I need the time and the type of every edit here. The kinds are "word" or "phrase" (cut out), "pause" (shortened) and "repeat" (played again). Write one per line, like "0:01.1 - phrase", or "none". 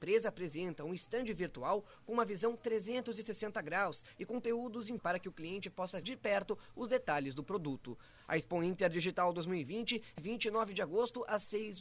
0:05.0 - word
0:06.0 - word
0:10.2 - word